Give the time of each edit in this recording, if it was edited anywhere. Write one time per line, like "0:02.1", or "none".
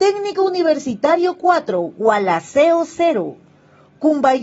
none